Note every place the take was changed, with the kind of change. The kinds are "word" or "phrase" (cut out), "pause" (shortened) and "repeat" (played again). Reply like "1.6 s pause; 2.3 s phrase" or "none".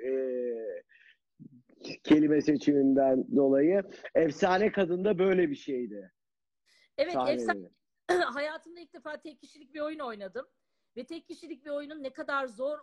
none